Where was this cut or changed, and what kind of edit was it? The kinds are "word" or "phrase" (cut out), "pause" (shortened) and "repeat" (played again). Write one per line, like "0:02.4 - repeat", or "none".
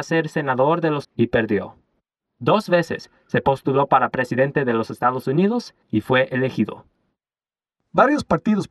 0:01.0 - phrase
0:05.8 - pause